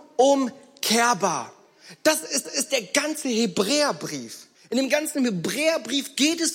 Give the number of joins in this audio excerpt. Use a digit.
2